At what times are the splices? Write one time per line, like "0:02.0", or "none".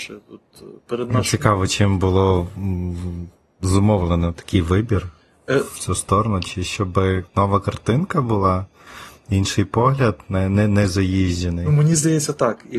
none